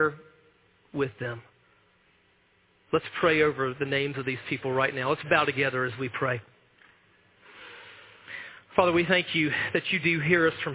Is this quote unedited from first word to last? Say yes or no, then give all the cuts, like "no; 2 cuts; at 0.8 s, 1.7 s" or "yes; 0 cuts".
yes; 0 cuts